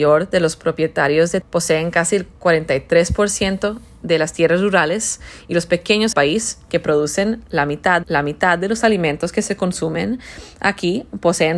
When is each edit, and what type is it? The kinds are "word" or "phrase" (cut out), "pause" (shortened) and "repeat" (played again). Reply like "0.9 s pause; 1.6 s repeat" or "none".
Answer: 1.4 s word; 6.1 s phrase; 8.0 s repeat